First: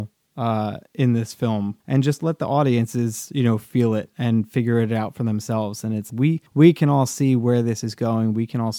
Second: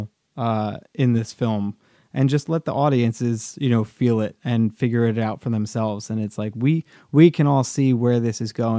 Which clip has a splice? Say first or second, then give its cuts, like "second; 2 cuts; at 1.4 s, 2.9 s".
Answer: first; 3 cuts; at 1.8 s, 6.1 s, 6.5 s